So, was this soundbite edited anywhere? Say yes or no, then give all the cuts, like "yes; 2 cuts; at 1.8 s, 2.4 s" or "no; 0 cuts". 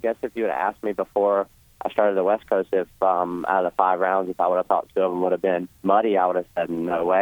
yes; 1 cut; at 5.8 s